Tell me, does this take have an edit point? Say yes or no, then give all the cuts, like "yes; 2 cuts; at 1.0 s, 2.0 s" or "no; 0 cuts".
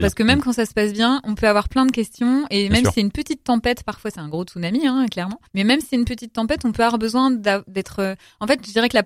yes; 1 cut; at 5.5 s